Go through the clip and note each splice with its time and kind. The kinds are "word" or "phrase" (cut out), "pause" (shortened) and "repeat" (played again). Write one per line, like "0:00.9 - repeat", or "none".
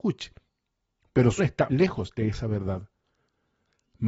0:01.4 - word
0:01.7 - word